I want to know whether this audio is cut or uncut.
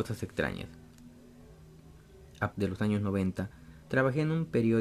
cut